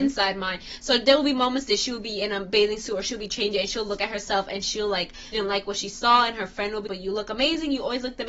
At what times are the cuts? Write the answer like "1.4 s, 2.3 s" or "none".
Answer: 5.3 s, 6.9 s